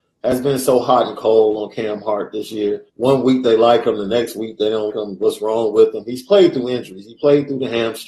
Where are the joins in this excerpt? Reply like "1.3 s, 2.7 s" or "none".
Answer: 2.9 s, 4.9 s